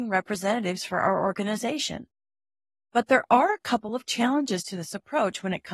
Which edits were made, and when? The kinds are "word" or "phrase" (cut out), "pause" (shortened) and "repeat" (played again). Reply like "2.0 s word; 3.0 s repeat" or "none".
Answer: none